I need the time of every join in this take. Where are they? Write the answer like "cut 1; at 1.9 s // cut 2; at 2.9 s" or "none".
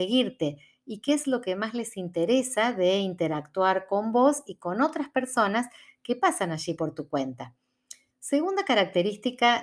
none